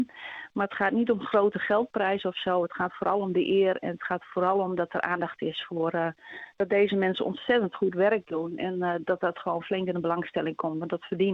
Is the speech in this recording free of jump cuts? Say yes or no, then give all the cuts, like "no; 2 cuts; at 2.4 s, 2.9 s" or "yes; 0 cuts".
yes; 0 cuts